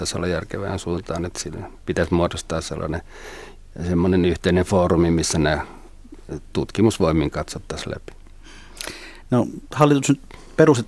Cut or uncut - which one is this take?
uncut